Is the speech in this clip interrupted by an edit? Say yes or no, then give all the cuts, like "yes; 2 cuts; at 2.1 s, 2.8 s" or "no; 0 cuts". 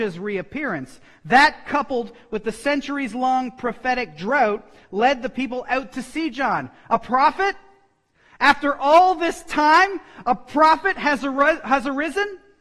no; 0 cuts